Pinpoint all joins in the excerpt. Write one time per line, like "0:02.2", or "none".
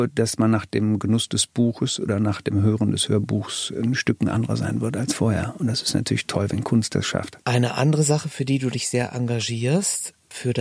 0:07.4